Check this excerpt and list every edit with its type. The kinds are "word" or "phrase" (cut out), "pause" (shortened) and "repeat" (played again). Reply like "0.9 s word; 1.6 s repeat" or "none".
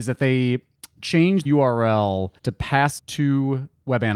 1.5 s word; 2.4 s pause; 3.0 s word